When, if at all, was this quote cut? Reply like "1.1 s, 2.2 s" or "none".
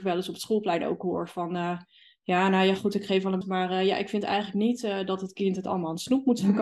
3.4 s